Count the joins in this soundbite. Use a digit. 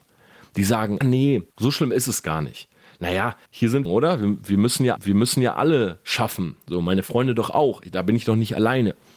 5